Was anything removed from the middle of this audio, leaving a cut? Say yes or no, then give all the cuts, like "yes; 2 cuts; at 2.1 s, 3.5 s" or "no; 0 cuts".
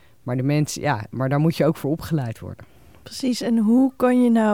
no; 0 cuts